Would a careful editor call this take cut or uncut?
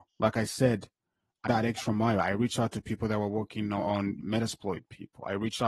cut